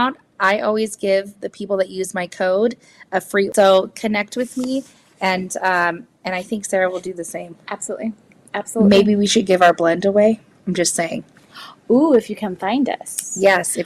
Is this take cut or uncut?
uncut